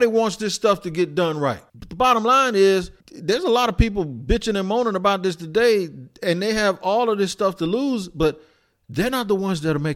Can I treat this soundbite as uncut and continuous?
no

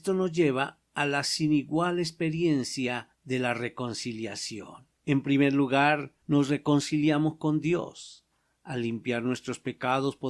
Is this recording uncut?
no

